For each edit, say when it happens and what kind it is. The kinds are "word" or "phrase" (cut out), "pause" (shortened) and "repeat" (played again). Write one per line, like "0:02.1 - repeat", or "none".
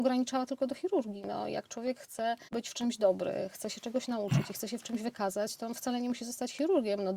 0:02.5 - pause